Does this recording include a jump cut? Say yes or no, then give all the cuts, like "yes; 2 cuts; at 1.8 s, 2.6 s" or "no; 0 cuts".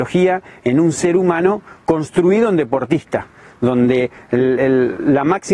no; 0 cuts